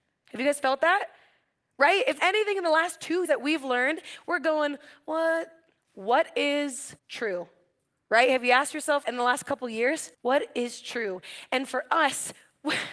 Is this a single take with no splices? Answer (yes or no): no